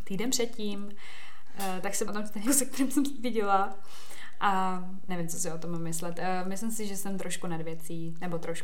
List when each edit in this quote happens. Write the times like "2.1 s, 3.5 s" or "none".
2.1 s, 2.5 s, 5.1 s